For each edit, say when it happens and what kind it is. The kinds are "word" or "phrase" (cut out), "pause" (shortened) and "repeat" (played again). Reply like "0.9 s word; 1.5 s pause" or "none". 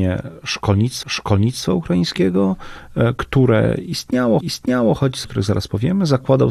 1.0 s repeat; 4.4 s repeat; 5.2 s phrase